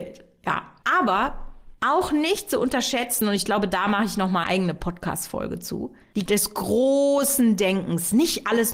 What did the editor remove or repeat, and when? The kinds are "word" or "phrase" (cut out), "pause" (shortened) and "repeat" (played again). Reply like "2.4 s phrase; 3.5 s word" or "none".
4.4 s word; 6.3 s word